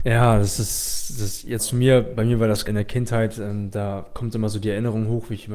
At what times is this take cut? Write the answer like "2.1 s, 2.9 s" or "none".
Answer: 1.6 s, 2.7 s